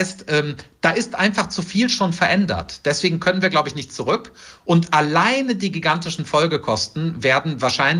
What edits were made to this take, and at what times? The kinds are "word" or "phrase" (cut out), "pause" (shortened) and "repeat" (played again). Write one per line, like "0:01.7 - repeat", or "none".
none